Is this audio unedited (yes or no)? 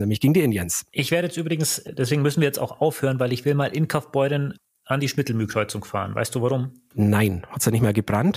yes